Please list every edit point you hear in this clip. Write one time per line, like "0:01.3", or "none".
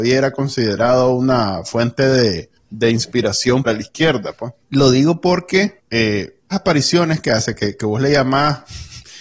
0:03.7
0:04.6
0:06.5